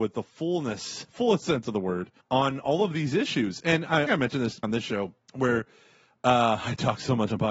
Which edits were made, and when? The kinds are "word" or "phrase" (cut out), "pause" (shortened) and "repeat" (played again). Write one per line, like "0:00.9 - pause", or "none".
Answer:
0:02.2 - pause
0:04.1 - phrase
0:04.6 - word
0:05.2 - pause